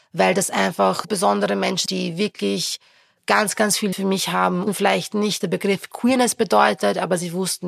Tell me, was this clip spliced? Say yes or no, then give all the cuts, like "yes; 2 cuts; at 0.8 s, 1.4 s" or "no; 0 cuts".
yes; 5 cuts; at 1.0 s, 1.9 s, 3.9 s, 4.7 s, 5.4 s